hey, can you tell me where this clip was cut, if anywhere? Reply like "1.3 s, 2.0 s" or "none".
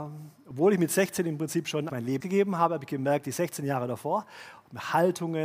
1.9 s, 2.2 s